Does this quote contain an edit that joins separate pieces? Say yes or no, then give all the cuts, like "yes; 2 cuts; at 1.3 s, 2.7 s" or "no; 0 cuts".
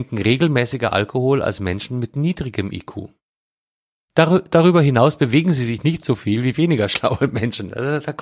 no; 0 cuts